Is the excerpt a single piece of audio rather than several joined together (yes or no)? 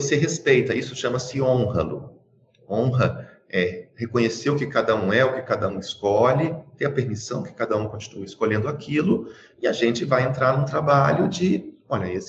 yes